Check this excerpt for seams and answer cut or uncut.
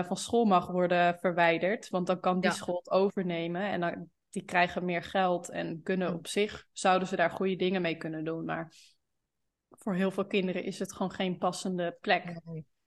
uncut